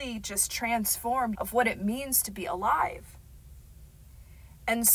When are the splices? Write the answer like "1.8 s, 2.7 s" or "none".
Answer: 1.3 s